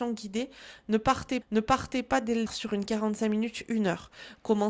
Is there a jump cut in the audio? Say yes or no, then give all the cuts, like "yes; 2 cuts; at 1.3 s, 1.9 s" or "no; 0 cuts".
yes; 2 cuts; at 1.4 s, 2.5 s